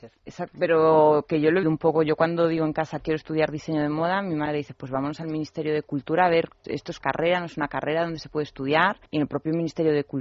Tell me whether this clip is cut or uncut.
cut